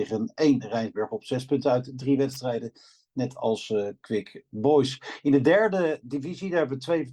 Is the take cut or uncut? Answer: uncut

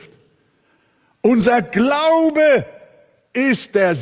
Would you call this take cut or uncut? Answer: uncut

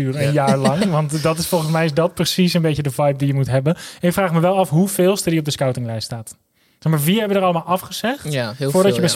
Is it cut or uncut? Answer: uncut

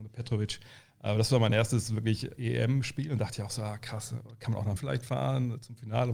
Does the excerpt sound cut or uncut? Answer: cut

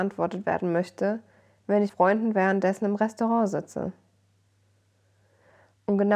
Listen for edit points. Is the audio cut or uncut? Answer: cut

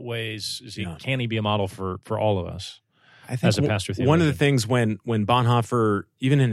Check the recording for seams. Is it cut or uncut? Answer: uncut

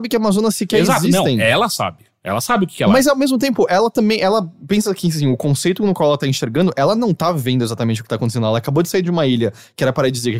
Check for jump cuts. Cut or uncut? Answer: uncut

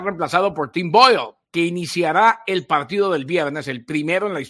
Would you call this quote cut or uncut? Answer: cut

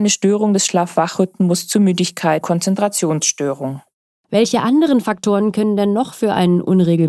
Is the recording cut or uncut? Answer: cut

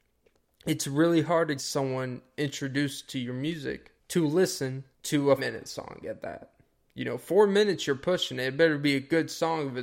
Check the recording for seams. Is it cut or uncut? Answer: cut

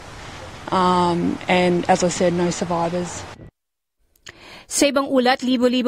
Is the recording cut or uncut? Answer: uncut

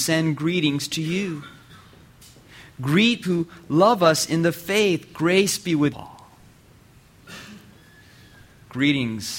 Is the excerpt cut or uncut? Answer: cut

